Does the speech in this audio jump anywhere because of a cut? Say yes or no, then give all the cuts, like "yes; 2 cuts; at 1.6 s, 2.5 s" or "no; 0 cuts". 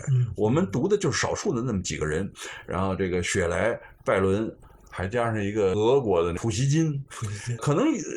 no; 0 cuts